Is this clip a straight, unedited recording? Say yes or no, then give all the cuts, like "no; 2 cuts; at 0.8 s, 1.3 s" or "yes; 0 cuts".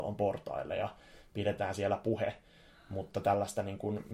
yes; 0 cuts